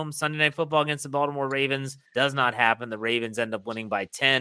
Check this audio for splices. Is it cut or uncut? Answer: cut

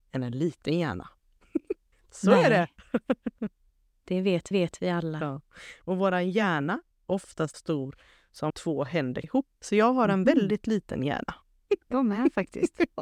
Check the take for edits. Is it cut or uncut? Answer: cut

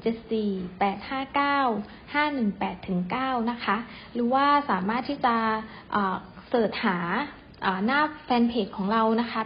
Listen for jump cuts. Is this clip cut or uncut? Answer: uncut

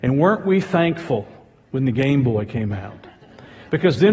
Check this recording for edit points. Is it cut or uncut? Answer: uncut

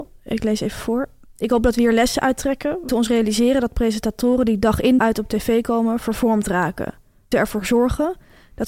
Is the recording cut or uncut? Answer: cut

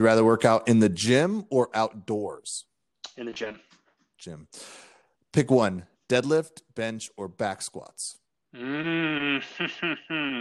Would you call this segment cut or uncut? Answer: uncut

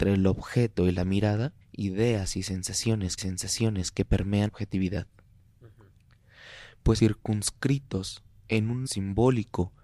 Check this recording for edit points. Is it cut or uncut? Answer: cut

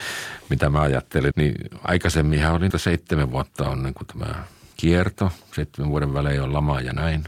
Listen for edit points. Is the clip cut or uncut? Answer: cut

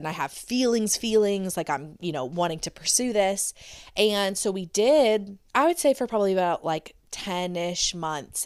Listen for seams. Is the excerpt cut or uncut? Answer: cut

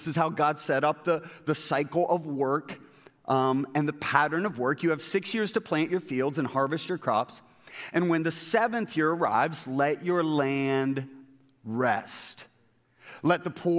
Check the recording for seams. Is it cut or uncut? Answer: uncut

